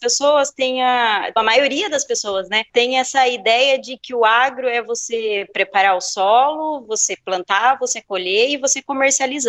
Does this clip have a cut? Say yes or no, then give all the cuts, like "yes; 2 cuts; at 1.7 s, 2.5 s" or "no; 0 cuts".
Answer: no; 0 cuts